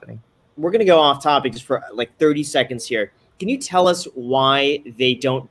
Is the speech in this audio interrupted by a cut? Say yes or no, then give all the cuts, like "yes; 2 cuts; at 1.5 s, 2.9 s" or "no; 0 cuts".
no; 0 cuts